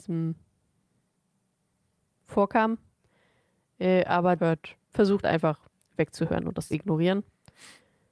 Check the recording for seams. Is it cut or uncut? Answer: cut